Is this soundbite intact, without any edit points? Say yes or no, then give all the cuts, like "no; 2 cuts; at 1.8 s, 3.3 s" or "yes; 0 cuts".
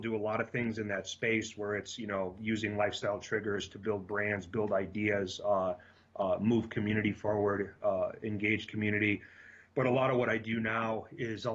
yes; 0 cuts